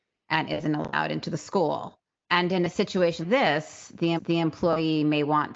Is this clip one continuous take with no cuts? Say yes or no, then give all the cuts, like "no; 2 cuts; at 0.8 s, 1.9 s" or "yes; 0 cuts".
no; 3 cuts; at 2.0 s, 3.2 s, 4.2 s